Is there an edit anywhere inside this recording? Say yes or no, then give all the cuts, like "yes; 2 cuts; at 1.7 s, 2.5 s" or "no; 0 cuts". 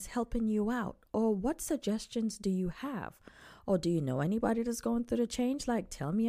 no; 0 cuts